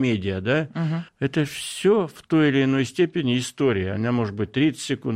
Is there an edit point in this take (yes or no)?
yes